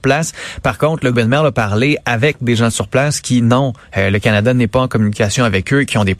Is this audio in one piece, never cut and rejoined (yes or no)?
no